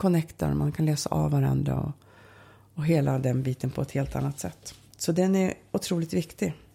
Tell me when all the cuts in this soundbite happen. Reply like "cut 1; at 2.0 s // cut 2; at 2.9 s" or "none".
none

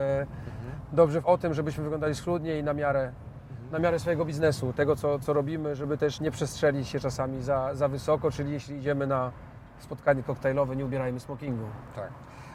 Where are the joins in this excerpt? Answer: cut 1; at 1.2 s // cut 2; at 6.2 s

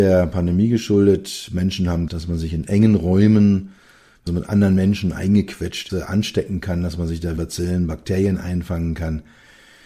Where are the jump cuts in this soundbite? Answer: cut 1; at 2.1 s // cut 2; at 4.3 s // cut 3; at 5.9 s // cut 4; at 7.4 s

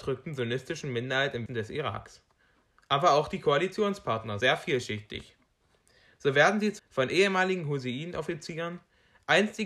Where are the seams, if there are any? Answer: cut 1; at 1.5 s // cut 2; at 4.4 s // cut 3; at 6.8 s

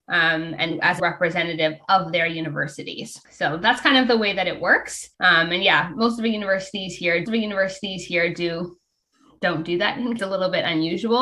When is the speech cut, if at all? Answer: cut 1; at 1.0 s // cut 2; at 3.2 s // cut 3; at 5.1 s // cut 4; at 7.3 s // cut 5; at 10.2 s

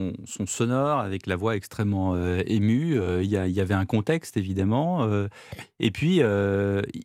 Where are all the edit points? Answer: none

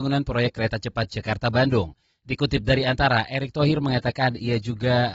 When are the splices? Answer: none

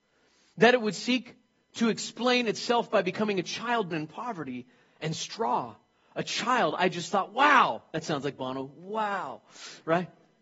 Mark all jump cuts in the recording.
cut 1; at 3.9 s

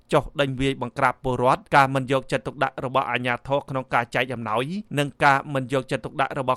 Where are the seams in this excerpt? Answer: cut 1; at 1.7 s // cut 2; at 4.9 s

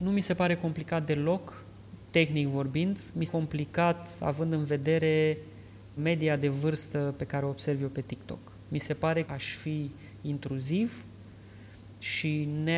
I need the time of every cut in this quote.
cut 1; at 3.3 s // cut 2; at 6.0 s // cut 3; at 9.2 s

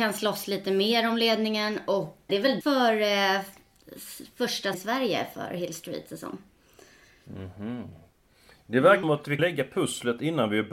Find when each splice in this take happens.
cut 1; at 2.3 s // cut 2; at 2.6 s // cut 3; at 4.7 s // cut 4; at 6.1 s // cut 5; at 9.0 s // cut 6; at 9.4 s

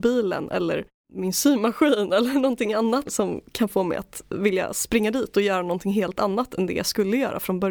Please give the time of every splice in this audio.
cut 1; at 3.1 s

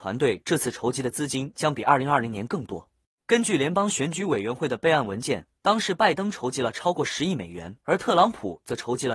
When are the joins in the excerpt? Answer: cut 1; at 5.6 s // cut 2; at 7.8 s

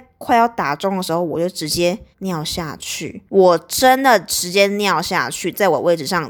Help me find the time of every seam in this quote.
cut 1; at 2.1 s // cut 2; at 3.3 s

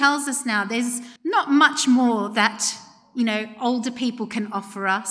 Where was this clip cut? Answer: cut 1; at 1.2 s

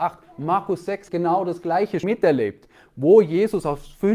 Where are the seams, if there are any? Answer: cut 1; at 1.1 s // cut 2; at 2.0 s

